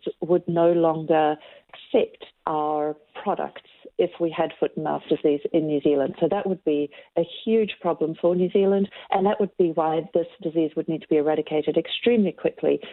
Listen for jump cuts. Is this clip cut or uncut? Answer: uncut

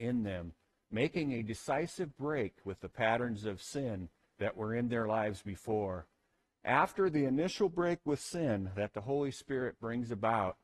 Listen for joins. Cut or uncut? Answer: uncut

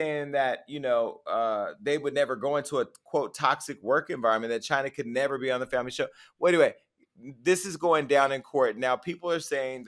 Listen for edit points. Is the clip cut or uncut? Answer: uncut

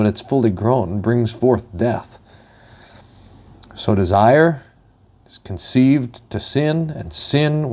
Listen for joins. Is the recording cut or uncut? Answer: uncut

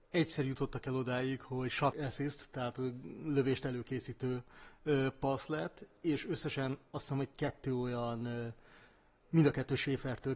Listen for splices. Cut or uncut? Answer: cut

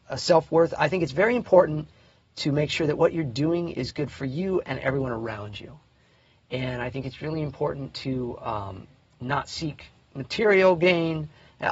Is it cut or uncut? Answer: uncut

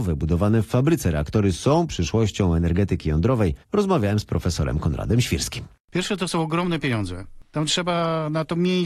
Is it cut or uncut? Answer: cut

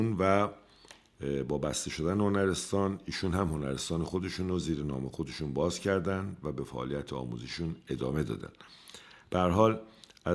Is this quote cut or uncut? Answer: uncut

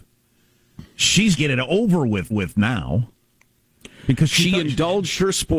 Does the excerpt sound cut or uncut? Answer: cut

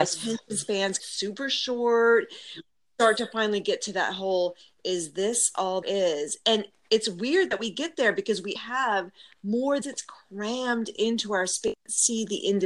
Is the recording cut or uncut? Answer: cut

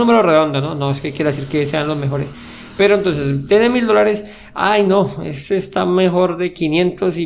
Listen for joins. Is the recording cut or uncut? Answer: uncut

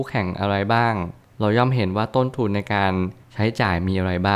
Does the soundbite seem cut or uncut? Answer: uncut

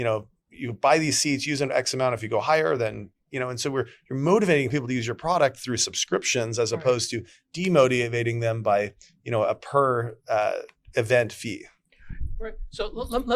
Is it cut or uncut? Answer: uncut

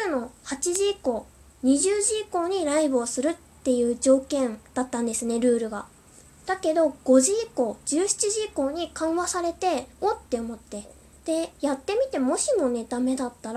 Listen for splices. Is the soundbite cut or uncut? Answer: cut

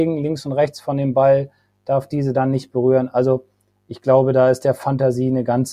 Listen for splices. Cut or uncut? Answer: uncut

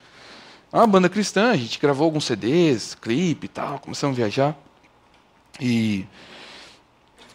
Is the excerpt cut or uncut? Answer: uncut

